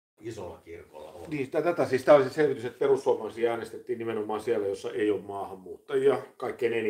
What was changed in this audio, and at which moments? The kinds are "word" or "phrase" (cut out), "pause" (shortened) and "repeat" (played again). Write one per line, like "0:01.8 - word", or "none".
none